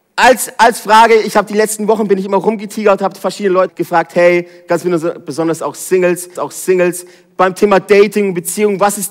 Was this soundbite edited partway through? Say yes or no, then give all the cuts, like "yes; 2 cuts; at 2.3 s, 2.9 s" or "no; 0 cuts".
yes; 2 cuts; at 3.7 s, 6.4 s